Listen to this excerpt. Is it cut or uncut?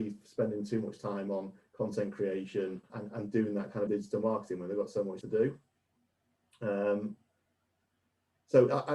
cut